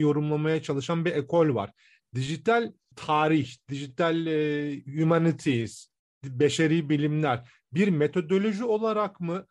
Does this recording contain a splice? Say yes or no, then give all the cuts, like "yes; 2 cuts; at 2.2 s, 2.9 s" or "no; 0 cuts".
no; 0 cuts